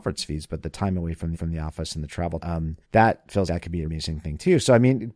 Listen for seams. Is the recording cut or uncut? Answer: cut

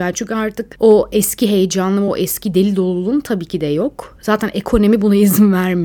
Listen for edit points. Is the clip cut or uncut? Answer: uncut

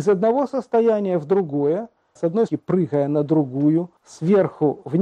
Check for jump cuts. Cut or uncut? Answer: cut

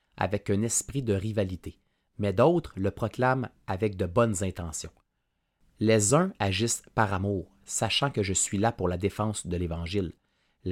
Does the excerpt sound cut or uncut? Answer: uncut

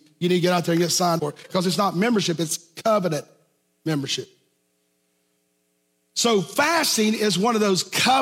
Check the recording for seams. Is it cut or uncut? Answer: cut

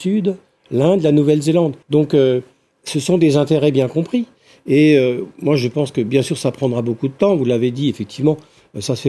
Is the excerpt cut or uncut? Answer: cut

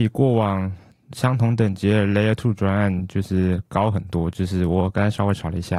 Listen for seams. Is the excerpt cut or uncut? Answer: uncut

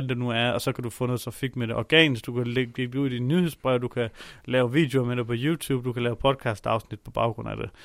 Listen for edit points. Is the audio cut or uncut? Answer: uncut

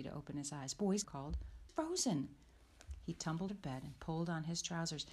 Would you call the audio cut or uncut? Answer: cut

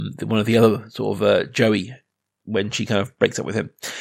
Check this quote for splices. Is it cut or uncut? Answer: uncut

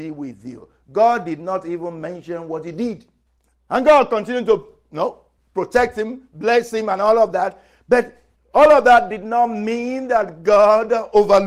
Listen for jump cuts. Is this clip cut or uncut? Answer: uncut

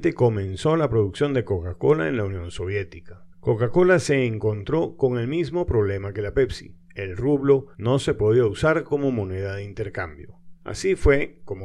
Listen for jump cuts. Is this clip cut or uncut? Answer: cut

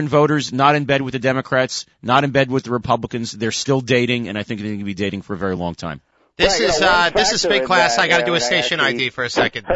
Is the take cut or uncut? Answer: uncut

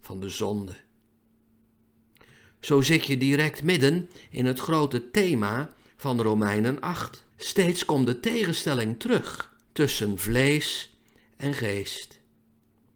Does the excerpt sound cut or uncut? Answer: cut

